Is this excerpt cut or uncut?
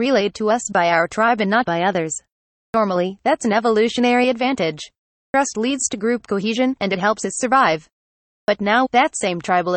uncut